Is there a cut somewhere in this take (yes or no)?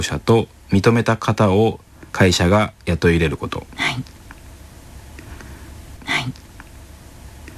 yes